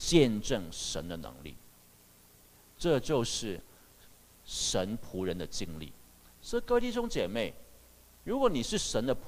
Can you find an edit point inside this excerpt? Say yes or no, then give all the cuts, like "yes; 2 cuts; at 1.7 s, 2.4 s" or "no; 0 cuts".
no; 0 cuts